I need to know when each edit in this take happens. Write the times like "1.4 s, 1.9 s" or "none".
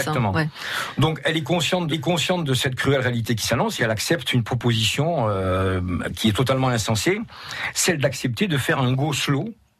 1.9 s, 3.8 s